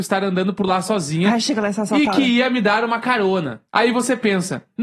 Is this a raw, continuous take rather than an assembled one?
no; 1 cut; at 3.7 s

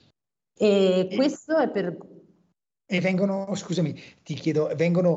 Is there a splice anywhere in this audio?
no; 0 cuts

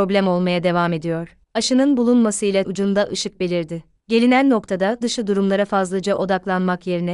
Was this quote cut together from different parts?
yes; 4 cuts; at 1.4 s, 2.6 s, 4.0 s, 5.0 s

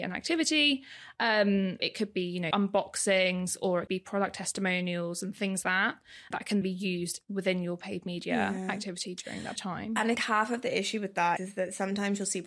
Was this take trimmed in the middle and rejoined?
yes; 9 cuts; at 1.8 s, 2.5 s, 3.9 s, 5.6 s, 6.3 s, 6.6 s, 9.6 s, 10.1 s, 11.4 s

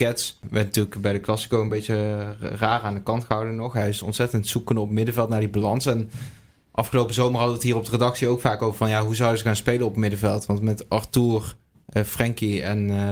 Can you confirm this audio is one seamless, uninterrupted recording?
yes; 0 cuts

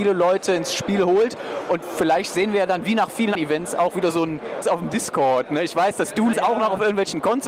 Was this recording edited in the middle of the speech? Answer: yes; 3 cuts; at 3.3 s, 4.6 s, 6.3 s

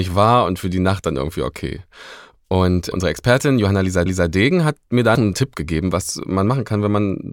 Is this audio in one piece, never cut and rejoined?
no; 3 cuts; at 2.9 s, 4.1 s, 5.1 s

